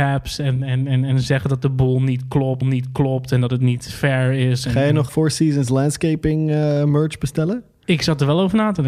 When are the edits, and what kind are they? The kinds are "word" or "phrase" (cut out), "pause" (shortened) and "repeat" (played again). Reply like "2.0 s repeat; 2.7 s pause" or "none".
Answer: 2.6 s repeat; 5.1 s word